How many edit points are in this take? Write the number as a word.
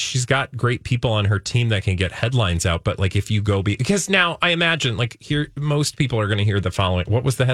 zero